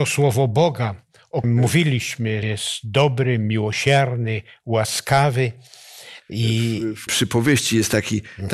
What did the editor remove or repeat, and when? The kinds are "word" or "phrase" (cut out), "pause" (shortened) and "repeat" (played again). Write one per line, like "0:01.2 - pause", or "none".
0:01.4 - word
0:02.4 - word
0:07.1 - word